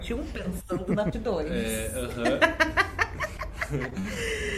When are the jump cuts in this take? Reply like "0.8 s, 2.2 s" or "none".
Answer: 1.1 s